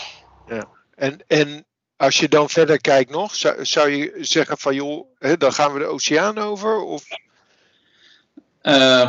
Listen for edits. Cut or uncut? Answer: uncut